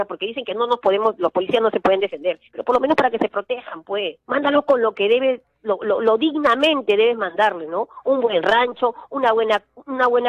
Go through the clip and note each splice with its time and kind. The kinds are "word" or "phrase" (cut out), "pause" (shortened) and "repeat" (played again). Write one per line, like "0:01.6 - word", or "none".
0:02.5 - pause
0:04.2 - pause